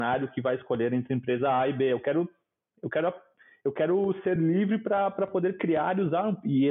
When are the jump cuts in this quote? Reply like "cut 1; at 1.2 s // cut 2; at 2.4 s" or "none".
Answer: none